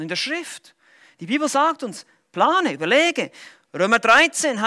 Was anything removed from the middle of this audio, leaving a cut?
no; 0 cuts

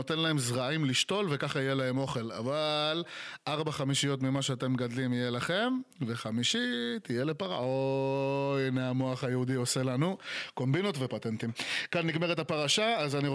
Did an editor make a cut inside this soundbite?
no; 0 cuts

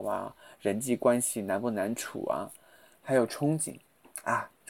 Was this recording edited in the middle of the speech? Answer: no; 0 cuts

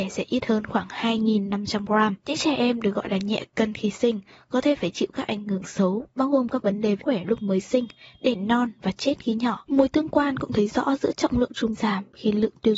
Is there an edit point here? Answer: yes; 2 cuts; at 7.0 s, 11.7 s

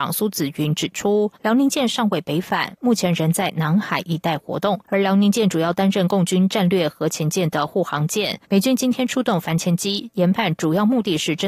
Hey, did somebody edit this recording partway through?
yes; 3 cuts; at 1.4 s, 4.8 s, 8.4 s

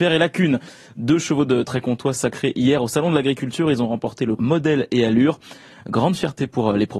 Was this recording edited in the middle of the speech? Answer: yes; 1 cut; at 4.4 s

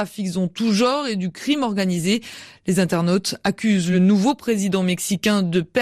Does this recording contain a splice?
no; 0 cuts

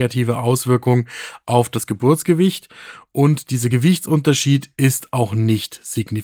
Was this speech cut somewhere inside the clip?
no; 0 cuts

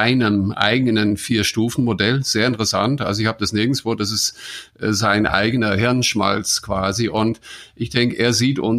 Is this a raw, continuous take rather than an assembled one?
yes; 0 cuts

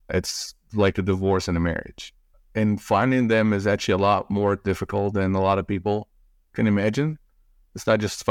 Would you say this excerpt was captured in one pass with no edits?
no; 1 cut; at 2.3 s

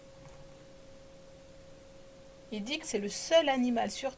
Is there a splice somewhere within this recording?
yes; 1 cut; at 2.8 s

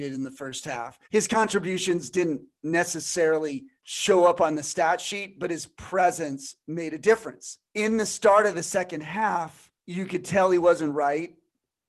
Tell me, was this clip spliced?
yes; 4 cuts; at 1.0 s, 3.8 s, 7.7 s, 9.8 s

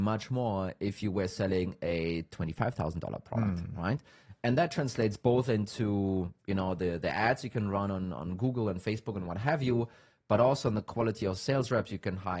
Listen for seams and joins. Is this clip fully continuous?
yes; 0 cuts

